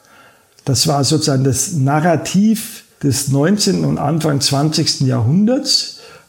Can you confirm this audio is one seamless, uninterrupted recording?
no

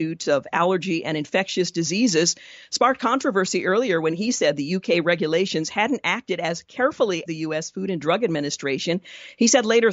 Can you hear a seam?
yes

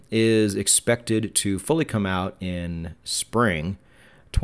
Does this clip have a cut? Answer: no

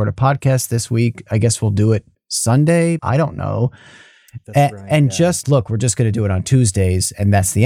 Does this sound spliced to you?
yes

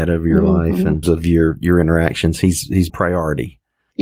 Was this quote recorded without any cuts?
no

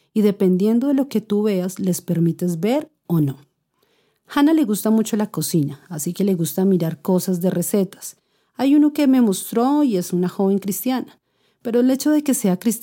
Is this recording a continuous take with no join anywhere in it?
yes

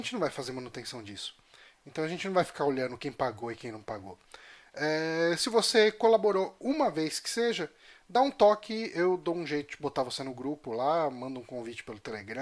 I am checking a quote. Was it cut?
no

